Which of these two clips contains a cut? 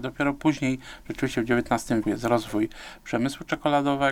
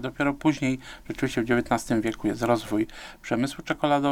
first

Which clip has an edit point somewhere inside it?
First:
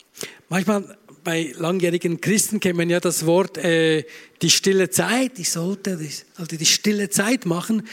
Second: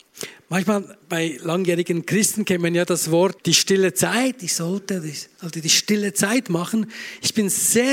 second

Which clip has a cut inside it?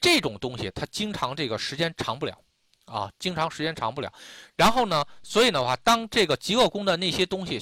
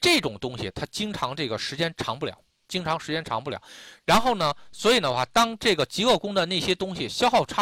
second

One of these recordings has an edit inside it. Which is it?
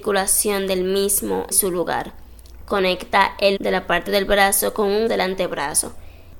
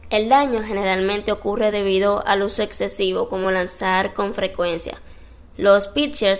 first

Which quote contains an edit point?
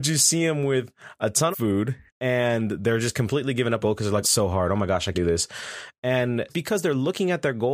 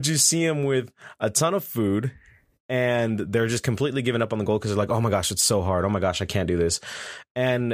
first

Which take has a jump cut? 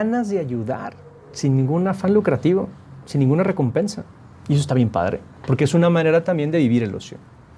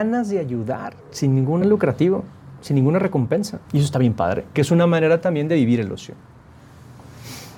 second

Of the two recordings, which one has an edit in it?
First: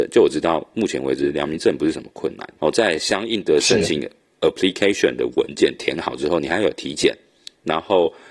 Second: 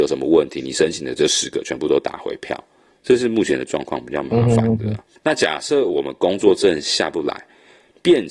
second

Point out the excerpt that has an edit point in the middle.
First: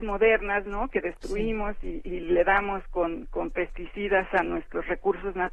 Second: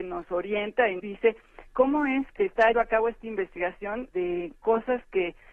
second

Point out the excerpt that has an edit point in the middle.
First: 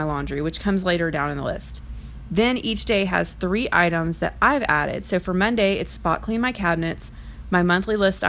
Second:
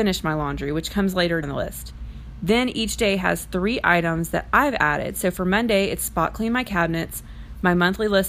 second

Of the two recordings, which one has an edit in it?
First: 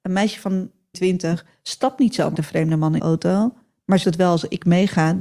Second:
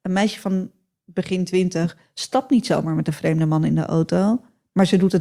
first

